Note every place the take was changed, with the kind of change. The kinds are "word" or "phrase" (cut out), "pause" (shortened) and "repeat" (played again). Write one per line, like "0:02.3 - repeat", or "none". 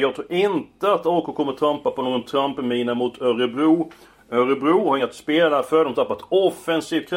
0:05.0 - word

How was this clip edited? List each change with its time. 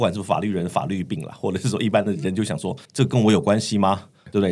0:02.8 - pause

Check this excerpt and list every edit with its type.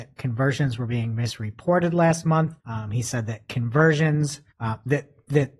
0:02.6 - pause
0:04.5 - pause

